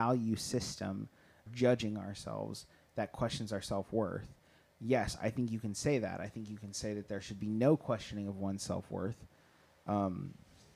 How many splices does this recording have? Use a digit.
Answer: 1